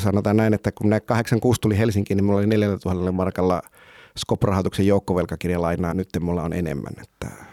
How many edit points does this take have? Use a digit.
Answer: 1